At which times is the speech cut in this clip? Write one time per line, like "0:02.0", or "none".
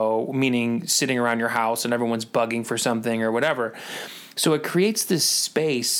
none